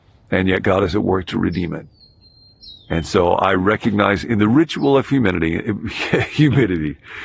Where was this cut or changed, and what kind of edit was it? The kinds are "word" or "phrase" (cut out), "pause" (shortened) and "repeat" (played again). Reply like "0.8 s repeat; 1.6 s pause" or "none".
none